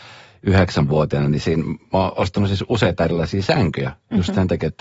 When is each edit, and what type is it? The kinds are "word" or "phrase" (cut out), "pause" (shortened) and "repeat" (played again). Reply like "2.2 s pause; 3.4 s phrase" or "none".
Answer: none